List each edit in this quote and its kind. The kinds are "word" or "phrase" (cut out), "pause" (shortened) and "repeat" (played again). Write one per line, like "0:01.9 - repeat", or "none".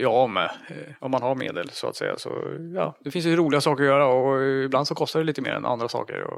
0:01.0 - pause

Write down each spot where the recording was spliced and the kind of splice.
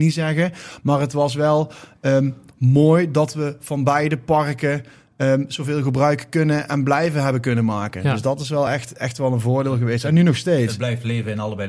none

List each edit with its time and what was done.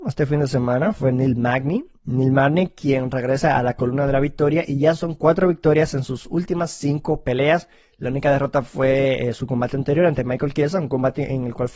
0:02.0 - pause

